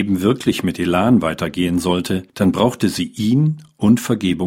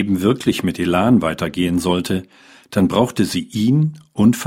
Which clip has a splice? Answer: first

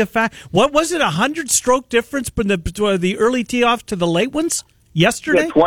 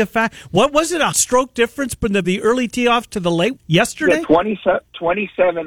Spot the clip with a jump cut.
second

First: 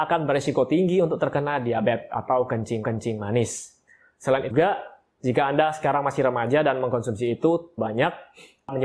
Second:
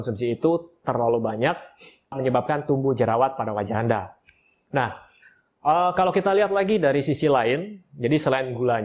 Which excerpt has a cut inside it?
first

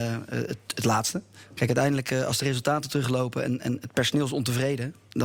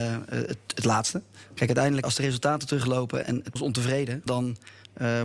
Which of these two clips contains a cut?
second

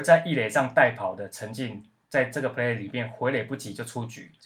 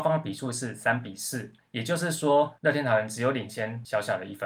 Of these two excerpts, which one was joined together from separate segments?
second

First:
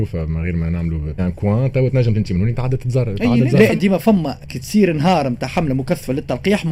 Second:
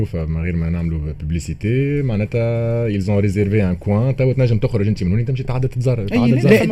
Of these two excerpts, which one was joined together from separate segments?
first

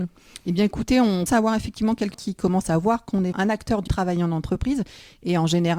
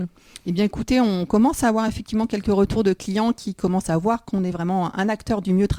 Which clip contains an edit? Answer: first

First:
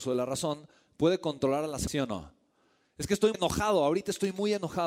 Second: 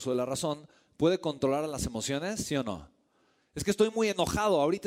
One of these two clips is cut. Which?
first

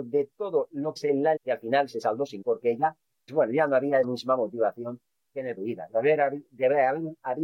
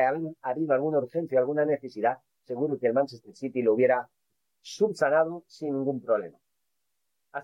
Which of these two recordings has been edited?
first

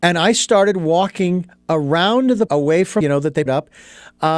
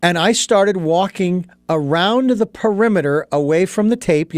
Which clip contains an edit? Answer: first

